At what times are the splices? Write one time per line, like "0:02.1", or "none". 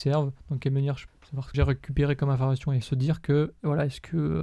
0:01.1
0:01.5
0:02.8